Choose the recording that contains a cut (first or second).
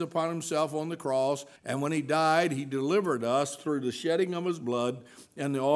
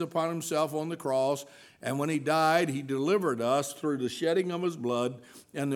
first